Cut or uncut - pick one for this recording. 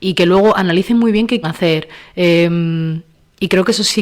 cut